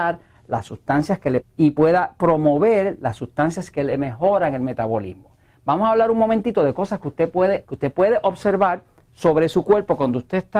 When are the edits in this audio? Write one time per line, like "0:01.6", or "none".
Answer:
0:01.4
0:07.6